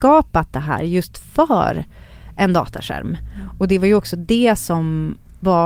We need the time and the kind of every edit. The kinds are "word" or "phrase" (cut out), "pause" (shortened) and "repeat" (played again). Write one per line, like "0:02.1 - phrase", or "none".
none